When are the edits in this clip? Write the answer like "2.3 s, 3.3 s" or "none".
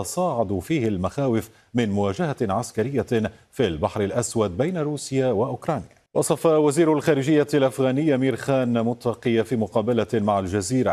6.1 s